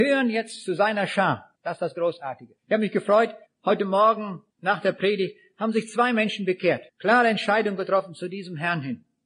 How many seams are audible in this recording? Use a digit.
5